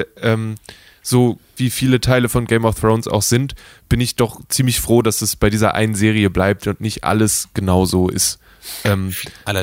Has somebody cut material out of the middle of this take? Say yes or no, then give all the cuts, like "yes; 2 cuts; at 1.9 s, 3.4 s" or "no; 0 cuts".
yes; 1 cut; at 1.6 s